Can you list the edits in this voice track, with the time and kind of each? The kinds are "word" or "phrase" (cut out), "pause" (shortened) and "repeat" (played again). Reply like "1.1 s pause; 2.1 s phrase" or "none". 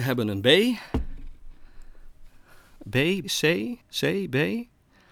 3.2 s word; 3.8 s pause